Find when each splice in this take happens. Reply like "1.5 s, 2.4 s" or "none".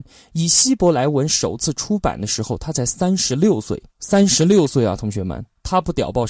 3.9 s